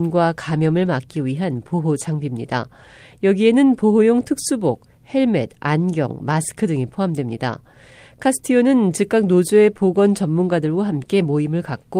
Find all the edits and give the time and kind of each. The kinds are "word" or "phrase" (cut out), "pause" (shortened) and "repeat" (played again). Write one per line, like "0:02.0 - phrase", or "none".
none